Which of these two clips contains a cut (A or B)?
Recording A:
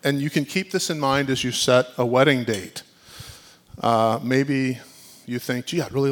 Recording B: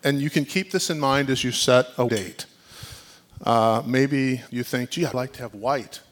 B